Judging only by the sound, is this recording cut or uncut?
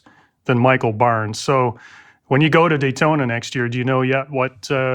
uncut